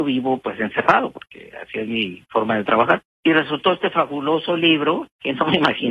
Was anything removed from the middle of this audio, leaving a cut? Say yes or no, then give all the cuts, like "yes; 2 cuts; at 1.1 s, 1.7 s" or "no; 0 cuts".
yes; 1 cut; at 3.1 s